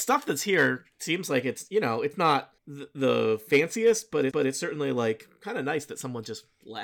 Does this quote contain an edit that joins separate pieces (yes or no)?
yes